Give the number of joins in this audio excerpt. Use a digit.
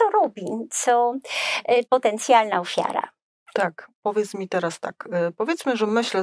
2